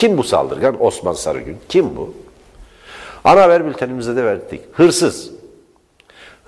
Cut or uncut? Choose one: uncut